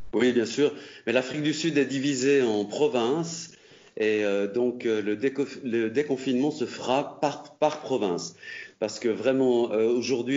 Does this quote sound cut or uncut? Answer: uncut